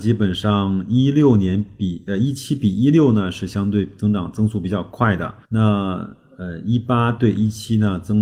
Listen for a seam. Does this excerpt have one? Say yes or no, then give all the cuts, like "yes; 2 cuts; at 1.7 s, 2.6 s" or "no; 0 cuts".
yes; 1 cut; at 5.4 s